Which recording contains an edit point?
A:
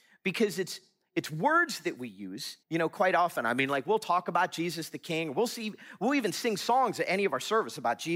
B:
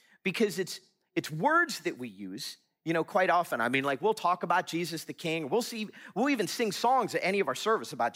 A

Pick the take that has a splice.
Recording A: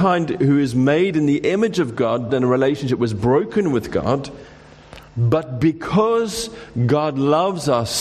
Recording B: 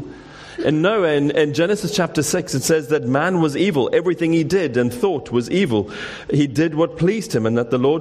A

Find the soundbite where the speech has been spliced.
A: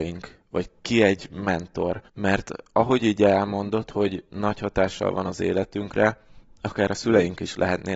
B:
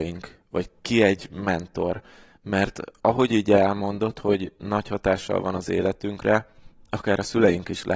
A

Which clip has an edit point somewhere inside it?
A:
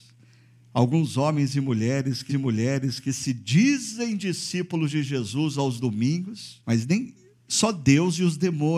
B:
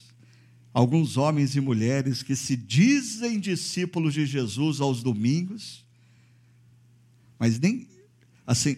A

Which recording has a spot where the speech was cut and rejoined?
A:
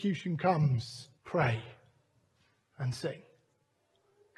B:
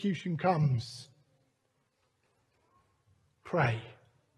A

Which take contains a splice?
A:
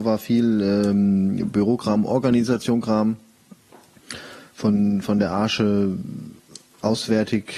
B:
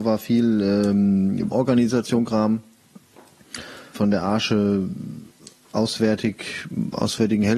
B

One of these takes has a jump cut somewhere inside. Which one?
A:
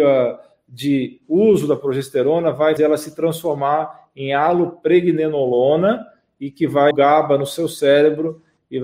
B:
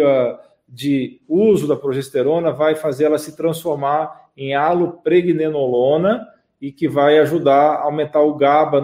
A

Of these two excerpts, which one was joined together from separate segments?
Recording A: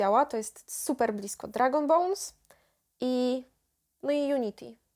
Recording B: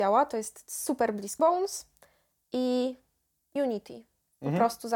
B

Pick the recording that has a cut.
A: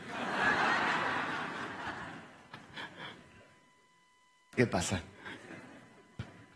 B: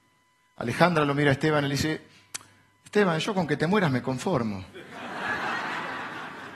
A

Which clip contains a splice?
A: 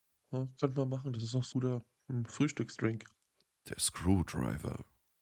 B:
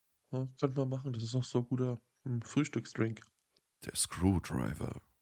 A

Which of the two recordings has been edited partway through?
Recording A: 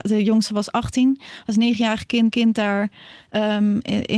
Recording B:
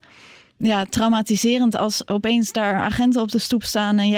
A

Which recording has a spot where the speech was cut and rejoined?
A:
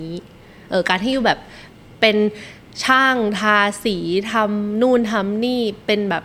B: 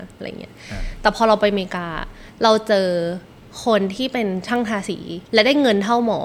B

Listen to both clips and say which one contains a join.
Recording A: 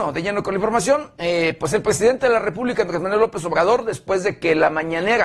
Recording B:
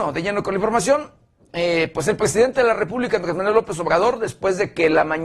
A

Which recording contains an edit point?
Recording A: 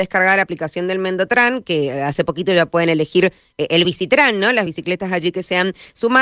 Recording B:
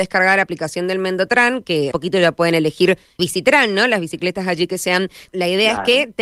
B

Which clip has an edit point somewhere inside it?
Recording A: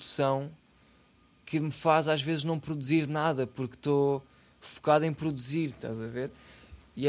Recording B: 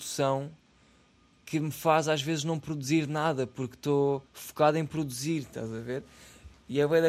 B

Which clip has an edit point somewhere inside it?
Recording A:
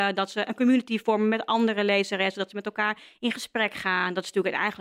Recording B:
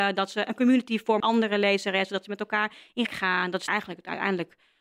B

